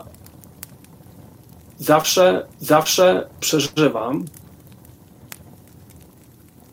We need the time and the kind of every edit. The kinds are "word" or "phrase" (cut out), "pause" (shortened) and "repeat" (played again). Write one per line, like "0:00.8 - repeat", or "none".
0:02.5 - repeat